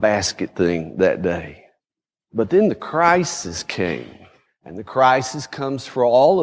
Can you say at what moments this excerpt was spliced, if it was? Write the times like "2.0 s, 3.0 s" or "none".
1.8 s, 4.5 s

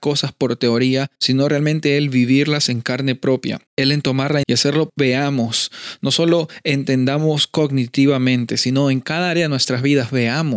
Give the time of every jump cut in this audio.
1.2 s, 3.7 s, 4.4 s, 4.9 s

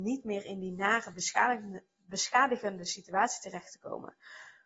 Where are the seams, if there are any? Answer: none

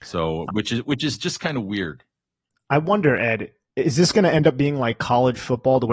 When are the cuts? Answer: none

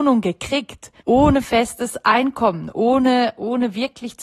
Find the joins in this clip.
1.0 s

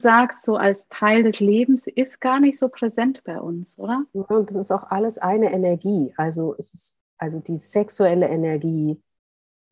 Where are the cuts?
7.1 s

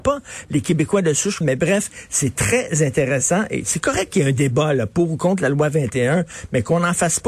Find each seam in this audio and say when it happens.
1.4 s

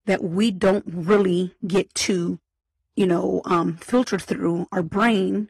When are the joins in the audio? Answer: none

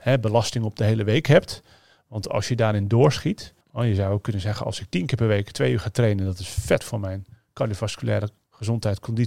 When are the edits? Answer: 3.6 s, 6.8 s

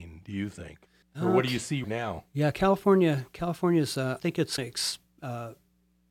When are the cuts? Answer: 1.0 s, 1.8 s, 4.2 s, 4.6 s

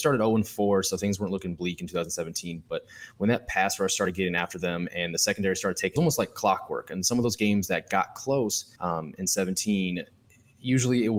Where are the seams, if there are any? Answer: 6.0 s, 8.8 s

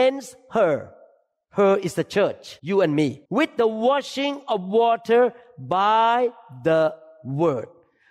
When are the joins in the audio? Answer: 2.6 s, 3.2 s

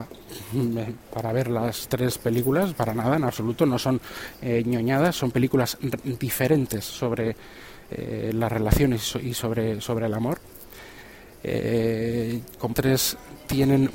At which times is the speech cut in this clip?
12.7 s

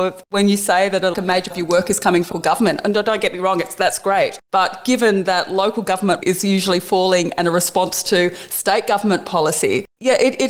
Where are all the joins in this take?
1.1 s, 1.5 s, 2.3 s, 6.2 s

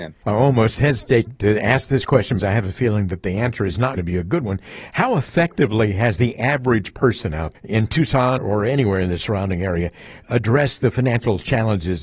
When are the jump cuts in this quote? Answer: 1.3 s, 2.4 s, 4.0 s, 7.5 s, 8.4 s

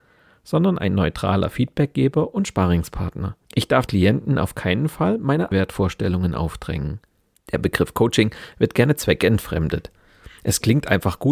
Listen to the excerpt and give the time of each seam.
3.4 s, 3.9 s, 5.5 s, 7.3 s

